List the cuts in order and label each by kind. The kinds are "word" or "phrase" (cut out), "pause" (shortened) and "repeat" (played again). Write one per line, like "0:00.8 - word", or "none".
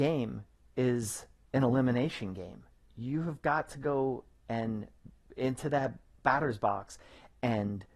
none